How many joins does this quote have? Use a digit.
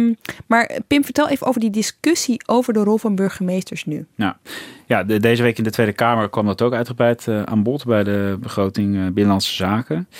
0